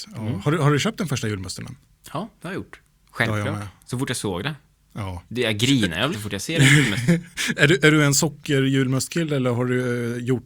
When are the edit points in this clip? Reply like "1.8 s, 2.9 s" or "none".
6.1 s